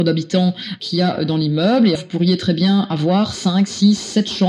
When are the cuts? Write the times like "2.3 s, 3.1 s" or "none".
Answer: 2.0 s